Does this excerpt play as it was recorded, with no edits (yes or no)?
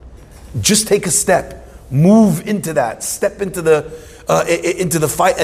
yes